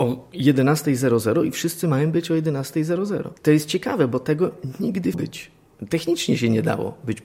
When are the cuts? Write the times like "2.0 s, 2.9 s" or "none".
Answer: 3.4 s, 5.1 s